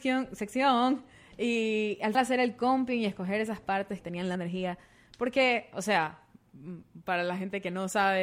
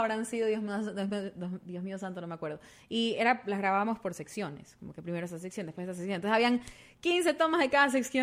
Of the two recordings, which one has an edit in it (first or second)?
first